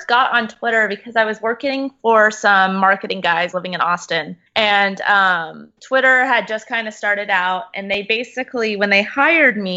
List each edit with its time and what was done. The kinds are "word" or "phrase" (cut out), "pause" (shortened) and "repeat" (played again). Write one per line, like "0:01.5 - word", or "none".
0:03.5 - phrase
0:04.5 - pause
0:05.8 - pause